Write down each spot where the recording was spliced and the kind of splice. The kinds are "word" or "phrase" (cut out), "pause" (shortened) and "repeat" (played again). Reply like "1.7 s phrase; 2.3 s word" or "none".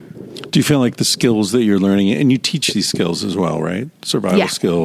none